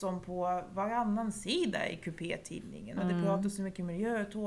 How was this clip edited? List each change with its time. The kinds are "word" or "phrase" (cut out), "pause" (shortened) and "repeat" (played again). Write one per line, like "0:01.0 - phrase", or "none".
none